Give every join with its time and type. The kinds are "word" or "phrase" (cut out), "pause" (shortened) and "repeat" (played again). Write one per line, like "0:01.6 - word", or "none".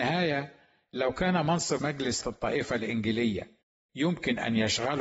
0:01.8 - word
0:02.2 - word